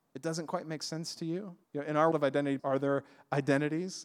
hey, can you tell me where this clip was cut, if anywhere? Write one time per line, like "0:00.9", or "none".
0:01.6
0:02.1
0:02.6